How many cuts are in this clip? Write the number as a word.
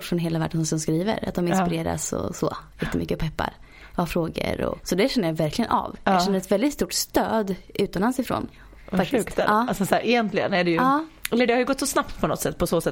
zero